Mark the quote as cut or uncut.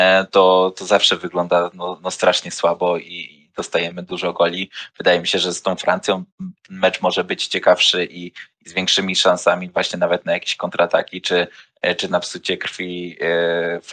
uncut